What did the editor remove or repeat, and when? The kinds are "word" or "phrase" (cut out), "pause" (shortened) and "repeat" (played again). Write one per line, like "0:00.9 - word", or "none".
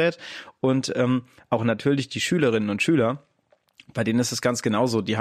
none